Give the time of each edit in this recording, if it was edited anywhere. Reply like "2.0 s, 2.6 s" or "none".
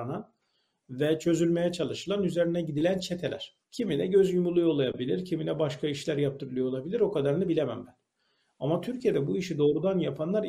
3.6 s

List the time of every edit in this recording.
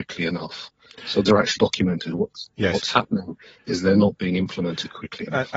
1.2 s, 1.6 s

